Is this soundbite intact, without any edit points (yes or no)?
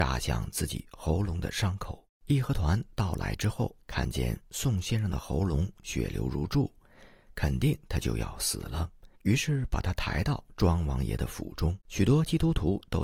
no